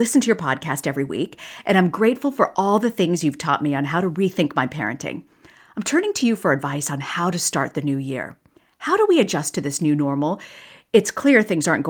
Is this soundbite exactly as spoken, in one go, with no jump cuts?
yes; 0 cuts

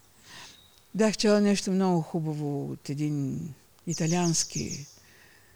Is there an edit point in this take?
no; 0 cuts

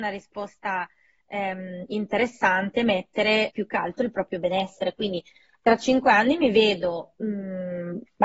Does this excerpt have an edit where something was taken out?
yes; 1 cut; at 3.5 s

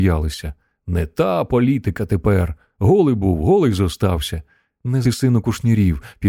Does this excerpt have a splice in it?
yes; 1 cut; at 5.0 s

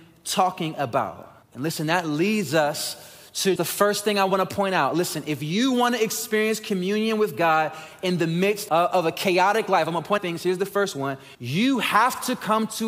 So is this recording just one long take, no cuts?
no; 5 cuts; at 1.4 s, 3.6 s, 8.7 s, 10.2 s, 11.3 s

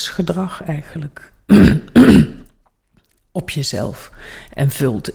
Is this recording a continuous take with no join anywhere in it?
yes; 0 cuts

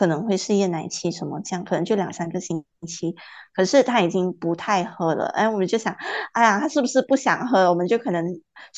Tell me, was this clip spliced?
no; 0 cuts

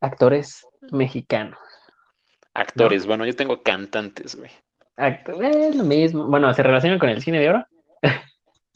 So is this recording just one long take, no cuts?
yes; 0 cuts

